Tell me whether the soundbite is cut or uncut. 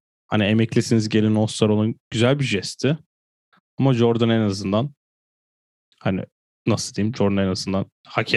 uncut